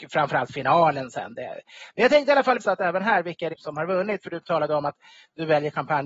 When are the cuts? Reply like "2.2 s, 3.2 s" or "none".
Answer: 2.6 s, 3.5 s